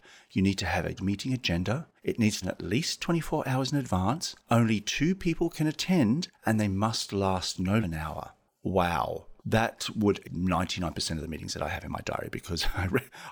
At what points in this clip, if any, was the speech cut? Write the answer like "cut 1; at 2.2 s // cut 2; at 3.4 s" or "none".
cut 1; at 1.0 s // cut 2; at 2.0 s // cut 3; at 2.4 s // cut 4; at 4.4 s // cut 5; at 6.3 s // cut 6; at 7.8 s // cut 7; at 9.4 s // cut 8; at 10.2 s